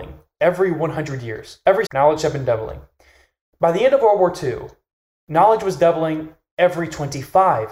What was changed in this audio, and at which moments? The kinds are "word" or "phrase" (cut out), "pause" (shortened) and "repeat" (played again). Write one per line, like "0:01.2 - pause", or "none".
0:01.9 - word